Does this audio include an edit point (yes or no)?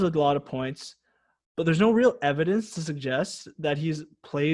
no